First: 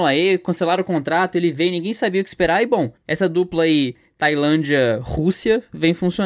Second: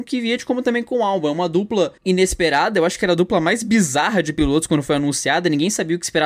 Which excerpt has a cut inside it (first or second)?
second